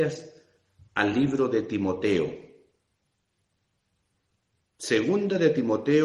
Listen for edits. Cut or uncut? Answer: uncut